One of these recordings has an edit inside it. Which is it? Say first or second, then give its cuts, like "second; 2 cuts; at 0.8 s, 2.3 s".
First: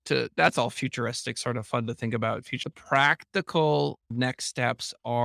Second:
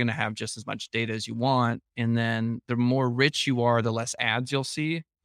first; 1 cut; at 2.6 s